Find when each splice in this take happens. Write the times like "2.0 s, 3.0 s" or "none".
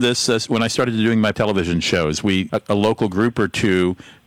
1.3 s, 2.5 s